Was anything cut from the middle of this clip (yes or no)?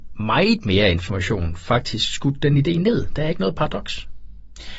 no